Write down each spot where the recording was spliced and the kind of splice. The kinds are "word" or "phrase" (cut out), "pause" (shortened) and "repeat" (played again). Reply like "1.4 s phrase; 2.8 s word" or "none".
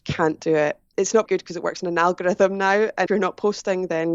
1.3 s word; 3.1 s word